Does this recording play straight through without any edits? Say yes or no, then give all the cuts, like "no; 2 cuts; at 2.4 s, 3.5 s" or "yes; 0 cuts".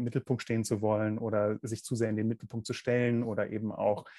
yes; 0 cuts